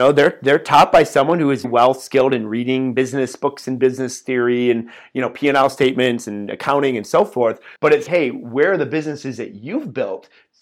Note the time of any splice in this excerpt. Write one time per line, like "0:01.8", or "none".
0:01.6
0:07.8
0:08.1